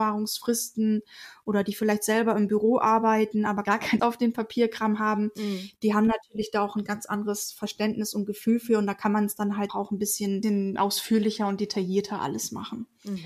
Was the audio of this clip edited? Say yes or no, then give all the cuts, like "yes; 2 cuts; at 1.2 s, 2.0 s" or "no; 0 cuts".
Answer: yes; 2 cuts; at 4.0 s, 9.7 s